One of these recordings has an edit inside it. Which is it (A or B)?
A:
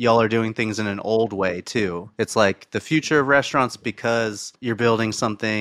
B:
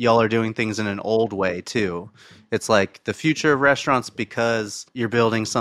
A